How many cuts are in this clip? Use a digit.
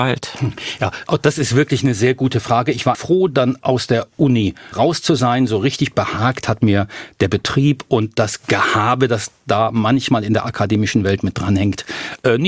1